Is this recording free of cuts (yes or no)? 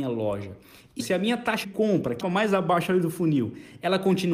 no